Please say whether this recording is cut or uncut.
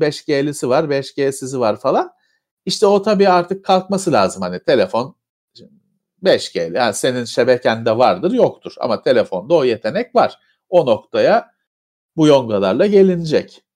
uncut